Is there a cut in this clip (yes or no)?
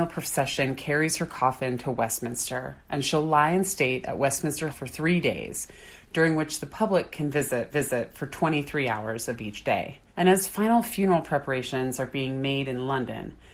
yes